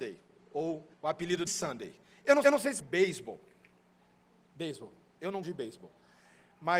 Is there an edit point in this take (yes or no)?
yes